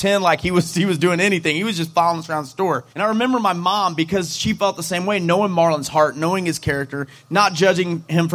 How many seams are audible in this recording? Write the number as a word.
one